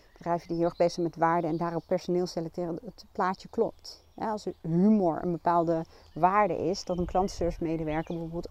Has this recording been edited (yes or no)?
no